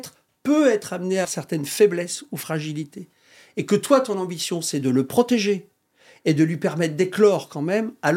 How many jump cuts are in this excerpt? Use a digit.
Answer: 1